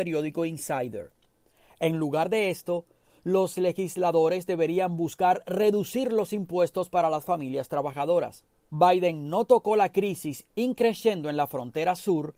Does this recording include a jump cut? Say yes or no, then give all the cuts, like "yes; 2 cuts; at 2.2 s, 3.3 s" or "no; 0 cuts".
no; 0 cuts